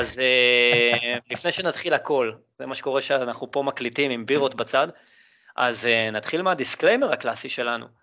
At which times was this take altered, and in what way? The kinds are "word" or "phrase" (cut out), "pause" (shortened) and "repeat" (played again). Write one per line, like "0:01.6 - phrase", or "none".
none